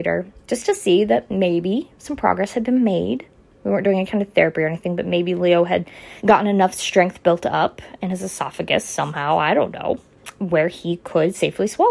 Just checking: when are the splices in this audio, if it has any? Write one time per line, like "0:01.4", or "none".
0:06.2

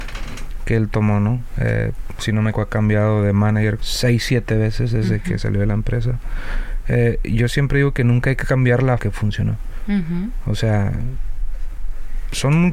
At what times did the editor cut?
0:02.5
0:03.8
0:09.0

